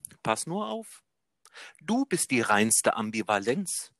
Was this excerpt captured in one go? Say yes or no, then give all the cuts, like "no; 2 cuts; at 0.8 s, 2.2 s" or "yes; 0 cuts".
yes; 0 cuts